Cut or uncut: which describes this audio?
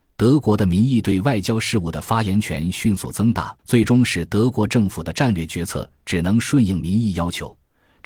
cut